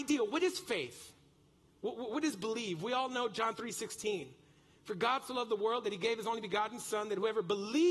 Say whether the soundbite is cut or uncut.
uncut